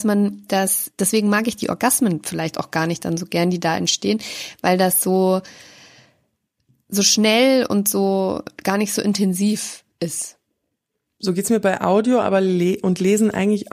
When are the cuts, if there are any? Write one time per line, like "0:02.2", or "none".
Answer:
none